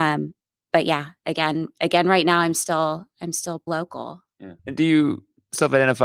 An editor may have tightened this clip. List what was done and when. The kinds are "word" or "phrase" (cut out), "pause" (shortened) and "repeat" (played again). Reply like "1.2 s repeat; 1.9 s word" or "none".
3.7 s word; 4.6 s pause